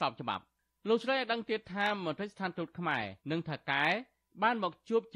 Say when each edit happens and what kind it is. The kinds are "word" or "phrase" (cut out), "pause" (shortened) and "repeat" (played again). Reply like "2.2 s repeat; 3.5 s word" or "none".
3.2 s pause